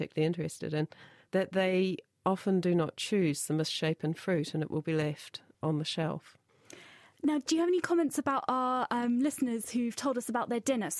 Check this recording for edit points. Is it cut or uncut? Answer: uncut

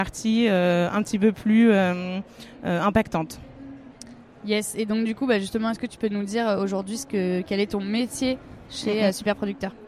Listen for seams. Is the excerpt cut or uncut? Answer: uncut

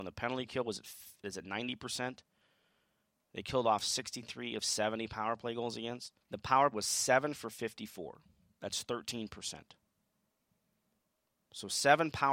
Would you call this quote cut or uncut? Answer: cut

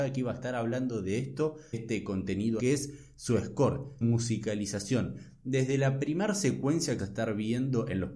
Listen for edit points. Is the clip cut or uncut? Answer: cut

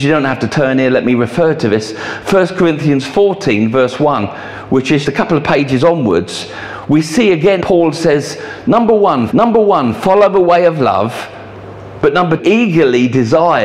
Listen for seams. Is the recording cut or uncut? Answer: cut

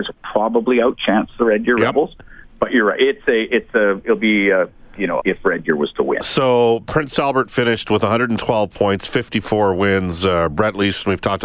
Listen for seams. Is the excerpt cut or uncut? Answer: cut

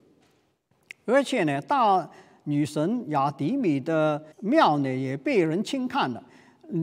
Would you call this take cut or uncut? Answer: cut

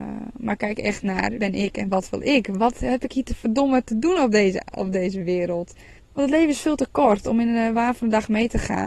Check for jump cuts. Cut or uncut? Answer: cut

